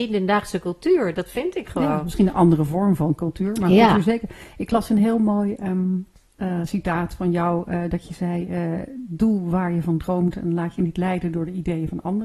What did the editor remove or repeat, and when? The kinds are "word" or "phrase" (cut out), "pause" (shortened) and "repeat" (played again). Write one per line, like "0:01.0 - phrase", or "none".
0:06.2 - pause